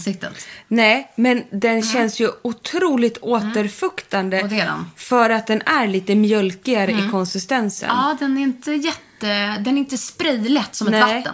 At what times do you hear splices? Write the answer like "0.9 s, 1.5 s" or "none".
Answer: none